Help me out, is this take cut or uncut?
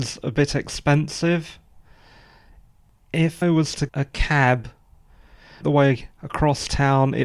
cut